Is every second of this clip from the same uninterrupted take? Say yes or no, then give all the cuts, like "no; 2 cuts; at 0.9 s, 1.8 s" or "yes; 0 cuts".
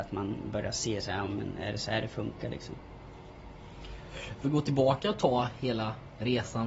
no; 1 cut; at 4.4 s